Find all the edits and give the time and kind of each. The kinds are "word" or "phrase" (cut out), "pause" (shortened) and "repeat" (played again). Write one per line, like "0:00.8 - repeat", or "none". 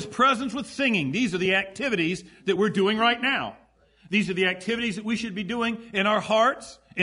none